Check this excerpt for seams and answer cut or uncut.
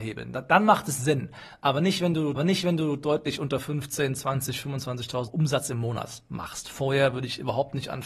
cut